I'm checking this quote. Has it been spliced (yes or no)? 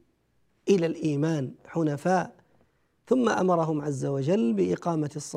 no